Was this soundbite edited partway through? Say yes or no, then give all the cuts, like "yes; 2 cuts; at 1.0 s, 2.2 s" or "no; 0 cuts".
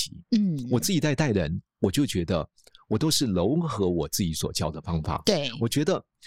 no; 0 cuts